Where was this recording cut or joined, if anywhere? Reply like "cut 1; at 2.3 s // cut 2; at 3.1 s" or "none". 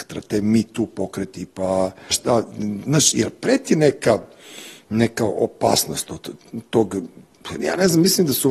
cut 1; at 2.1 s